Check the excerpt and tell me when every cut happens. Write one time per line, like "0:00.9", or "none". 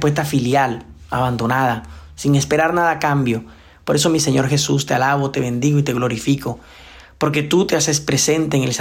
none